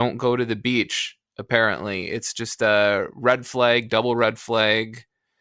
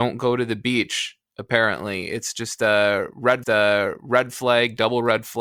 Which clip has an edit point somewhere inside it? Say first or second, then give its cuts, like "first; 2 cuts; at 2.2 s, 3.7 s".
second; 1 cut; at 3.4 s